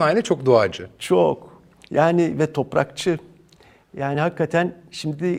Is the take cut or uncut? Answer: uncut